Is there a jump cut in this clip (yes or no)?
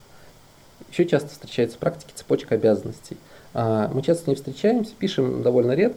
no